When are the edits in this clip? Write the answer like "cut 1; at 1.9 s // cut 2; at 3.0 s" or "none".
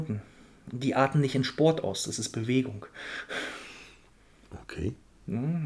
none